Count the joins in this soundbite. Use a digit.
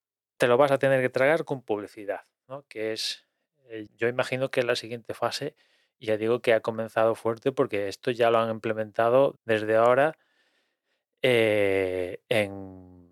2